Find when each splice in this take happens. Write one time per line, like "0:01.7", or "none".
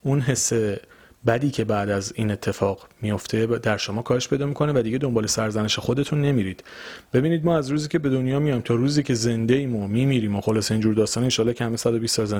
none